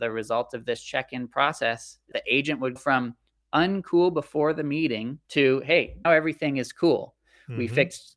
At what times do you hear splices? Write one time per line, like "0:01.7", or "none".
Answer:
0:02.1
0:02.8
0:05.2
0:06.0